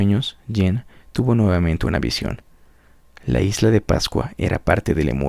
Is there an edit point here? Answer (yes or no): no